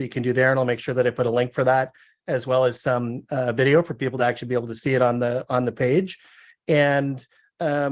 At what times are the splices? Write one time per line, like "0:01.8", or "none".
none